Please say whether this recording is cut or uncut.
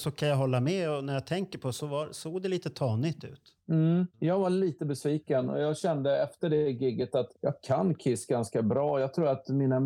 cut